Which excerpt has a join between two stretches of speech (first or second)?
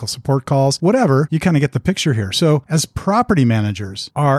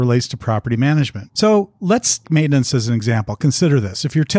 second